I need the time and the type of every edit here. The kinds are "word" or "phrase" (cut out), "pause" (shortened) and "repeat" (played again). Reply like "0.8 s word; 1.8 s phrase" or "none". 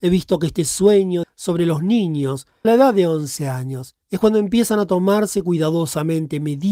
1.2 s word; 2.6 s word; 4.0 s pause

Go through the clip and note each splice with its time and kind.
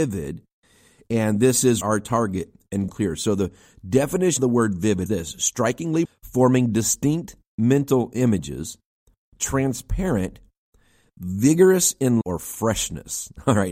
1.8 s word; 2.9 s word; 4.4 s word; 5.1 s word; 6.0 s word; 12.2 s word

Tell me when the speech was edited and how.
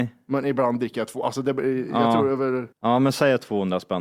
2.7 s pause

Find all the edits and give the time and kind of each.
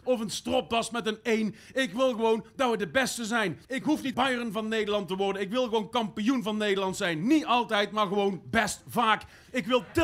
3.6 s pause; 4.1 s word

